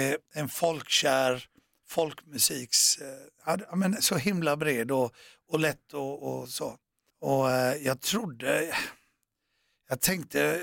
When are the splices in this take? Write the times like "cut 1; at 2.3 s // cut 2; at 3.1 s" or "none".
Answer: none